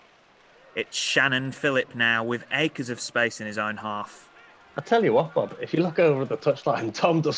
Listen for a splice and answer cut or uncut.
uncut